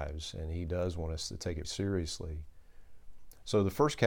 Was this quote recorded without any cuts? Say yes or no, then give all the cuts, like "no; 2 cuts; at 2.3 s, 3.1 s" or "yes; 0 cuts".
no; 1 cut; at 1.6 s